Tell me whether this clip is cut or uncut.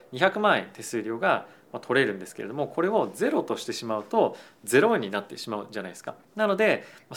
cut